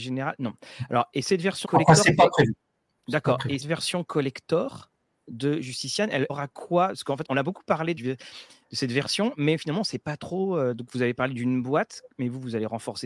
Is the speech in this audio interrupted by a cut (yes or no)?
yes